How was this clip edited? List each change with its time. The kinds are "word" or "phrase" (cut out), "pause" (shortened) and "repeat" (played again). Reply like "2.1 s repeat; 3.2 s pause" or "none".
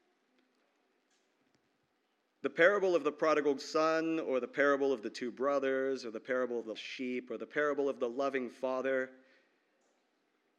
6.7 s word